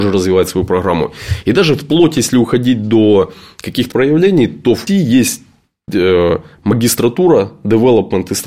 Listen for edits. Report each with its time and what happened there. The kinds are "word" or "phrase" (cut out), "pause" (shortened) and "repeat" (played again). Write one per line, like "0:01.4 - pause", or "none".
0:03.9 - word
0:04.9 - word